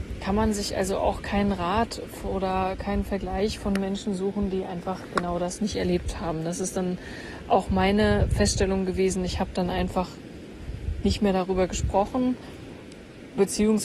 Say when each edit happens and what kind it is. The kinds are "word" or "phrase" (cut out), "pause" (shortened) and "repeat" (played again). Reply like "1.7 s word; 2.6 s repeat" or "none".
none